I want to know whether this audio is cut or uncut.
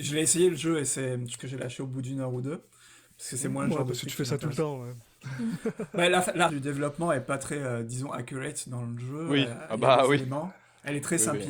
cut